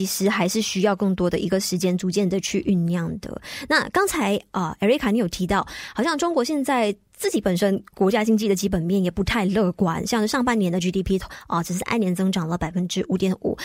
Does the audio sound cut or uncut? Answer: uncut